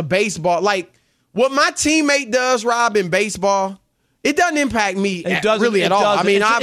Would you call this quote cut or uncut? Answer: uncut